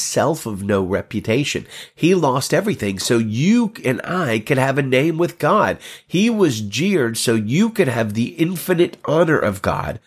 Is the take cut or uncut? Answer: uncut